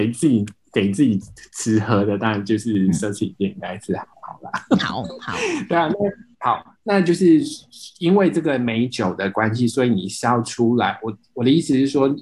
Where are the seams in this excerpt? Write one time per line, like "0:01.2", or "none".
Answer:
0:06.3